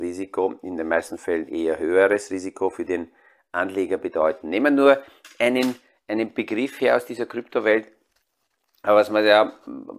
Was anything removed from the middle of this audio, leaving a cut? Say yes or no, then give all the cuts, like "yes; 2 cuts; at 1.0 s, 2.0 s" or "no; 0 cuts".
no; 0 cuts